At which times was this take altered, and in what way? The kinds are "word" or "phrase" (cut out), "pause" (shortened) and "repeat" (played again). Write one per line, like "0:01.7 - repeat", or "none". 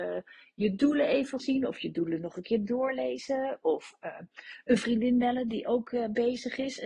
0:01.4 - phrase